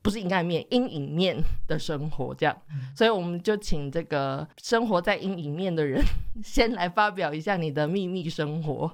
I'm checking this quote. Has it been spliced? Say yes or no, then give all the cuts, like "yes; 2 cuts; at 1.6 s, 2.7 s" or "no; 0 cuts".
yes; 1 cut; at 4.5 s